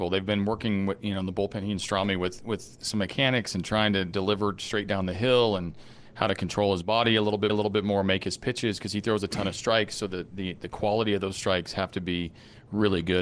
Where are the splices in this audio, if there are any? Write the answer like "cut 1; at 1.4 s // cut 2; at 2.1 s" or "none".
cut 1; at 7.5 s